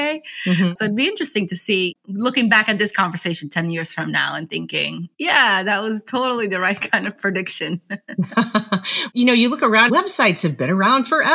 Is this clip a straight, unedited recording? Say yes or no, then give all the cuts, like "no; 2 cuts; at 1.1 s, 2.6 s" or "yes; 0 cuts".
no; 2 cuts; at 5.1 s, 9.9 s